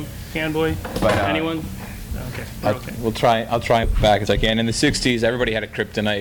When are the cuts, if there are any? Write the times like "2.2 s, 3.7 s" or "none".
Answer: 3.8 s, 4.3 s